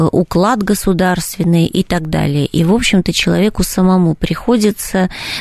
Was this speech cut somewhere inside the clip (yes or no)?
no